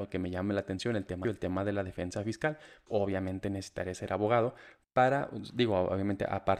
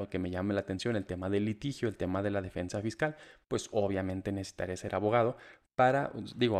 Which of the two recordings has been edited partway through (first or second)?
first